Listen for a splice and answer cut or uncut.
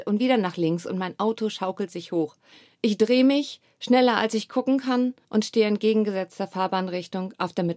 cut